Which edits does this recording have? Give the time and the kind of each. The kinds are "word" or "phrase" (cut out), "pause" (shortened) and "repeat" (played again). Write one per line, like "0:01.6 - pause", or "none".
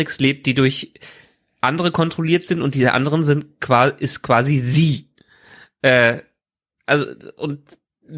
none